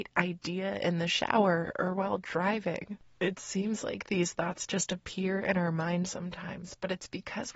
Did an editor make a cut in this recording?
no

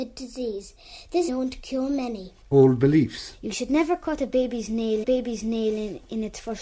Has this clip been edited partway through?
yes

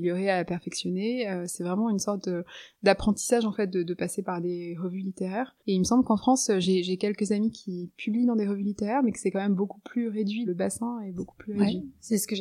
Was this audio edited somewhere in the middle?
yes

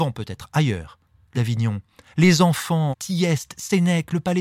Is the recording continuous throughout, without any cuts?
no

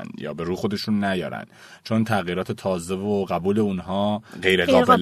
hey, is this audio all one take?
yes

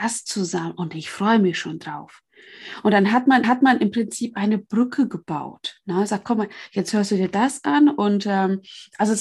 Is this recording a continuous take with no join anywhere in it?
no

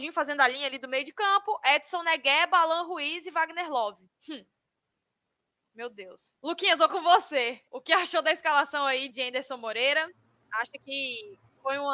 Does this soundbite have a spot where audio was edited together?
yes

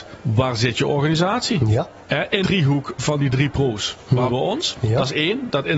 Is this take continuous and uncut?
no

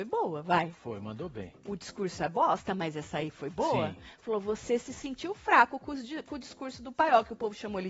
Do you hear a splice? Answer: no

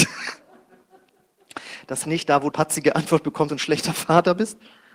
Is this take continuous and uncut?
no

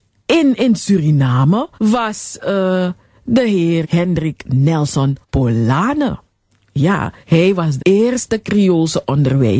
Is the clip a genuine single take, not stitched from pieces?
no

